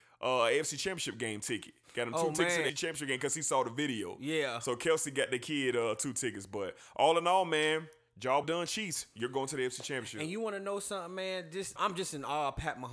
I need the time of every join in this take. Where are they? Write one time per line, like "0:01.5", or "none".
0:02.7
0:08.4
0:11.8